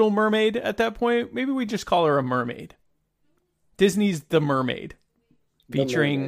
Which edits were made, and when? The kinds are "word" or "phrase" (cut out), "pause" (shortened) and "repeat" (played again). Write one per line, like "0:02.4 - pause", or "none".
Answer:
none